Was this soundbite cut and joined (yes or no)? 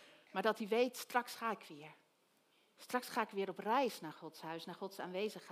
no